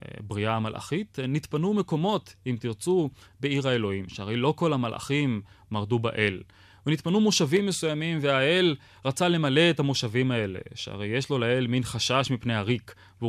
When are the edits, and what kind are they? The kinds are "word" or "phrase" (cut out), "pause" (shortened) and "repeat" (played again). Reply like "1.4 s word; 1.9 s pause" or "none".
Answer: none